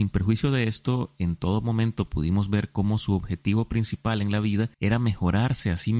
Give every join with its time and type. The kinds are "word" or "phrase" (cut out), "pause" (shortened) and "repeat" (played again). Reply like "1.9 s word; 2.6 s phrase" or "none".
4.7 s pause